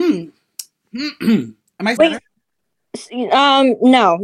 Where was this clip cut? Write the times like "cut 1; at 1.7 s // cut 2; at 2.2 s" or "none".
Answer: cut 1; at 2.0 s